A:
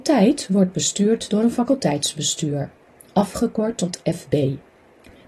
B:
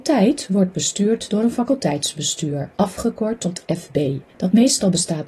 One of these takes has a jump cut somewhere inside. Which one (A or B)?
B